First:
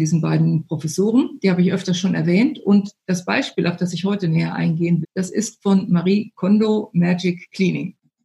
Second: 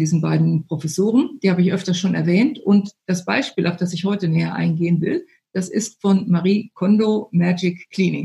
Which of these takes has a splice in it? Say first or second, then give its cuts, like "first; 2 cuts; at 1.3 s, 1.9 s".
first; 1 cut; at 5.0 s